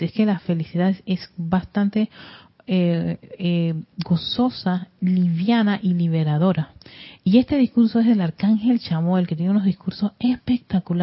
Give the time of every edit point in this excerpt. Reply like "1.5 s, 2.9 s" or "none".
none